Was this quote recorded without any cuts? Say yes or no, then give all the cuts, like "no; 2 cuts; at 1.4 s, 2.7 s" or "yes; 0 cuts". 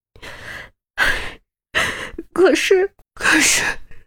no; 1 cut; at 3.0 s